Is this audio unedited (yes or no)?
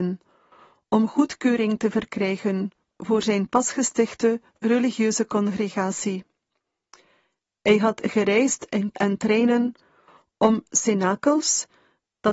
no